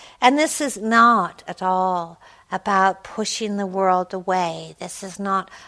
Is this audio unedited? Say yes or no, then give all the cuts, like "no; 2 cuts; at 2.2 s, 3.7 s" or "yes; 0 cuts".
yes; 0 cuts